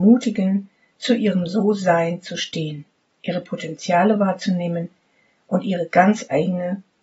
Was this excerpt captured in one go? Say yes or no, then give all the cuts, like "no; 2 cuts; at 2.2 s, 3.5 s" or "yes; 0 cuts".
yes; 0 cuts